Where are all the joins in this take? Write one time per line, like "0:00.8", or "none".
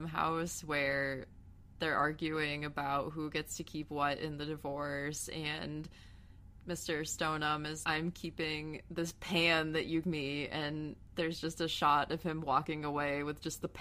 0:07.8
0:10.0